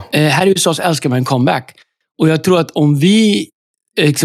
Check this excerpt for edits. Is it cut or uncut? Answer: uncut